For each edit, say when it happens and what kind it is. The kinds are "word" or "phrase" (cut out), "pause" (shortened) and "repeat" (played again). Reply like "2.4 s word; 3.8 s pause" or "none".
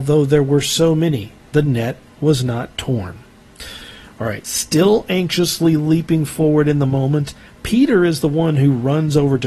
none

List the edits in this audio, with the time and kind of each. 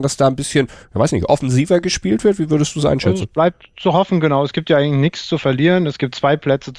none

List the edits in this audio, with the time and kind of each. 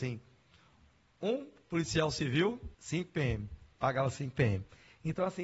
2.7 s pause

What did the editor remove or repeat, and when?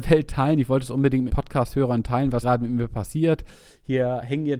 1.3 s word; 2.4 s word

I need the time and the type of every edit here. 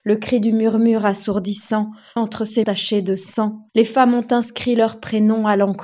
2.2 s word; 2.6 s word; 3.7 s pause

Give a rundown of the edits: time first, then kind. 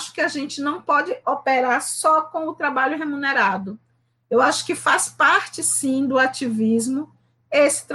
none

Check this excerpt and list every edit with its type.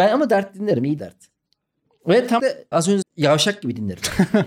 1.0 s word; 2.4 s word; 2.7 s word; 3.0 s word

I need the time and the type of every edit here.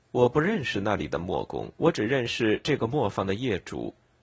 1.8 s pause

